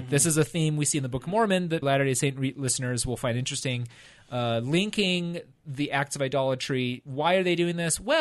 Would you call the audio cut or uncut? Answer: cut